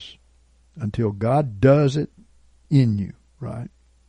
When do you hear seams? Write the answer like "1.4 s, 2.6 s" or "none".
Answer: none